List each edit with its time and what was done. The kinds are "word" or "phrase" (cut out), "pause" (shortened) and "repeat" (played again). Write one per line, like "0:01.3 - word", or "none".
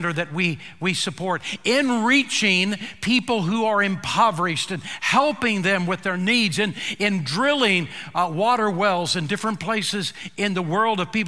none